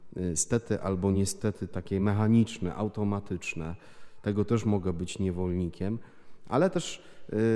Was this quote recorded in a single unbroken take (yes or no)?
yes